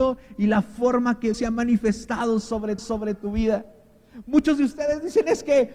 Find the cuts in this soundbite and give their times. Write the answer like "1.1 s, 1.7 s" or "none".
1.3 s, 2.8 s